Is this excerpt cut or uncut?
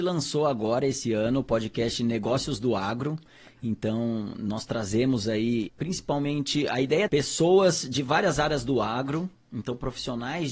cut